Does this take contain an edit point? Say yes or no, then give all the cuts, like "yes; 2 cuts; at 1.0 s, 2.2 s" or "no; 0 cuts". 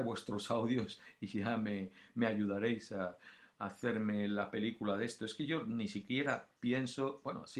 no; 0 cuts